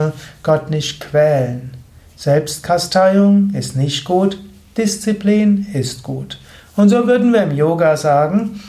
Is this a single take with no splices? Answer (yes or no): yes